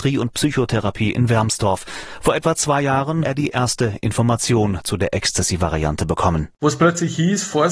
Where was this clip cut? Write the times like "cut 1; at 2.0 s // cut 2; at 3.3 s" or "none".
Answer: cut 1; at 3.2 s